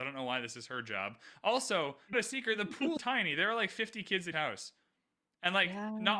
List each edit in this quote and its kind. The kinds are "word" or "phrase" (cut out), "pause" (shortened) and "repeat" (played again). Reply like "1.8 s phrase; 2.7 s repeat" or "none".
2.1 s word; 3.0 s word; 4.3 s word